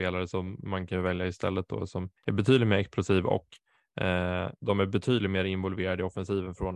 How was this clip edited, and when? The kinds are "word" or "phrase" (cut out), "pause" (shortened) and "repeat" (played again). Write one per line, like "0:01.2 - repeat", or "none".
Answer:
0:02.2 - pause
0:04.6 - pause